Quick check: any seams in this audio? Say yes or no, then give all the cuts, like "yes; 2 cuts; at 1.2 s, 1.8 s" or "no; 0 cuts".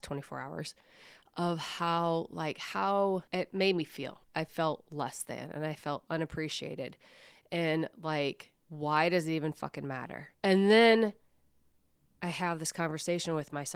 yes; 4 cuts; at 3.3 s, 4.2 s, 8.6 s, 10.3 s